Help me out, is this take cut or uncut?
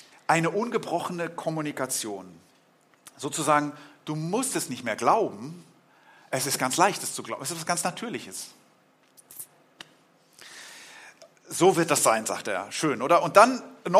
uncut